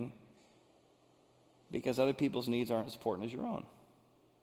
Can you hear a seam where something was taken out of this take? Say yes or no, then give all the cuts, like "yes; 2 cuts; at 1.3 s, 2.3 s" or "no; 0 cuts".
no; 0 cuts